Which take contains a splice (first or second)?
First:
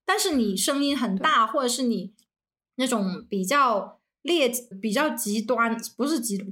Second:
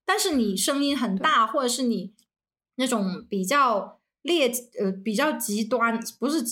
first